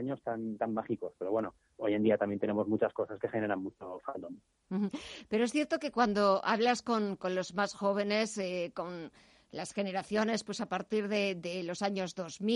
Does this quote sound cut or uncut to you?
uncut